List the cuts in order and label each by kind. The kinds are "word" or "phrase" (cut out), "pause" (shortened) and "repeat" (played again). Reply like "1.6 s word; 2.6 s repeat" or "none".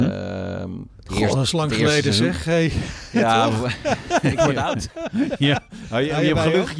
none